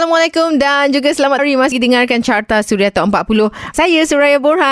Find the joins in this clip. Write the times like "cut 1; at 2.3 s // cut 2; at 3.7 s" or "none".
cut 1; at 1.4 s // cut 2; at 1.7 s // cut 3; at 3.7 s